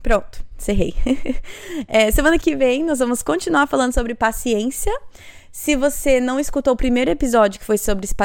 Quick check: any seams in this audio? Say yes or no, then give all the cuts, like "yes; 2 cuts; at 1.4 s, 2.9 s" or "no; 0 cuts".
yes; 1 cut; at 2.4 s